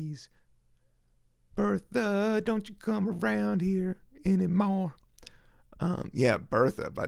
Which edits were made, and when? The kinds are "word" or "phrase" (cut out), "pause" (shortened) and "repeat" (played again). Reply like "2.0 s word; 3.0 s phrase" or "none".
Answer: none